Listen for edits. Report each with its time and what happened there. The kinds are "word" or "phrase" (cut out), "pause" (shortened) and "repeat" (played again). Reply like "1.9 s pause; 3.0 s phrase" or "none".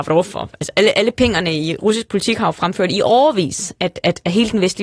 none